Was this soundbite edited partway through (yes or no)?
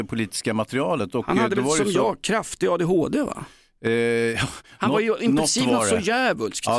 no